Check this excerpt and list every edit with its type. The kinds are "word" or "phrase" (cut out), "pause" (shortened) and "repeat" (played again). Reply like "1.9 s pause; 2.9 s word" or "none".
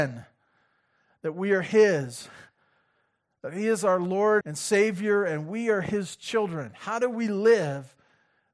4.4 s word